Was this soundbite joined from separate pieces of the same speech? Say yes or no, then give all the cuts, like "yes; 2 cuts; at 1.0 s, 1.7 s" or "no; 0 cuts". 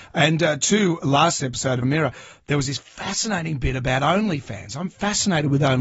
yes; 2 cuts; at 1.4 s, 1.8 s